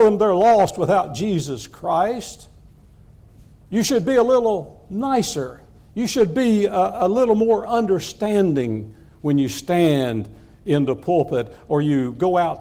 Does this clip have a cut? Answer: no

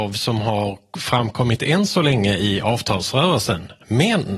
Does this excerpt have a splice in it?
no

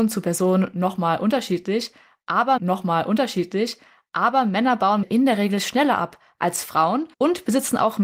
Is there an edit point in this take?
yes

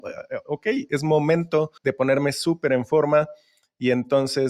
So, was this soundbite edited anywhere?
yes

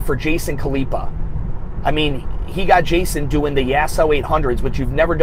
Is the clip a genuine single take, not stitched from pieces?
yes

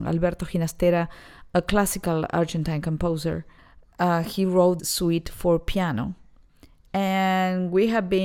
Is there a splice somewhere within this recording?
yes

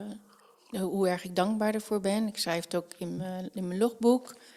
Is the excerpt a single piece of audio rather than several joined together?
yes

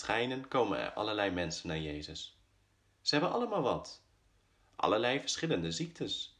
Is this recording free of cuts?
yes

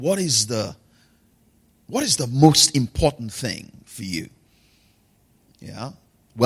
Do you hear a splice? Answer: no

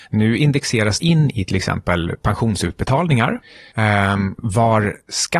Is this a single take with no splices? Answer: no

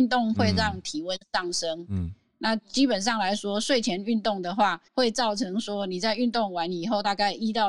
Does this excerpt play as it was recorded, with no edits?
no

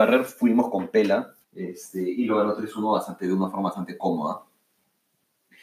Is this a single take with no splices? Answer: no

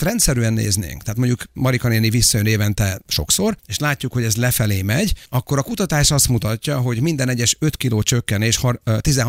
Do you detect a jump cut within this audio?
yes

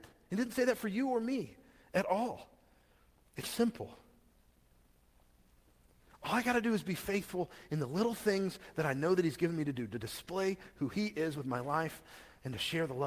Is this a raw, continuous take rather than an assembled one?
no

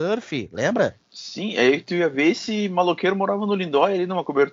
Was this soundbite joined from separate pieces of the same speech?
yes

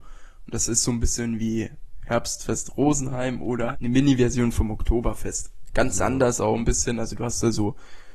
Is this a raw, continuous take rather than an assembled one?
no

